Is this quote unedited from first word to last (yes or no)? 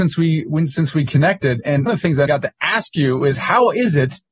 no